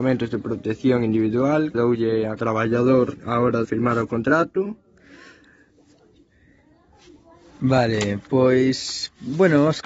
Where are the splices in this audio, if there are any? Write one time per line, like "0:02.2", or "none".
0:01.7
0:02.4
0:03.2
0:03.6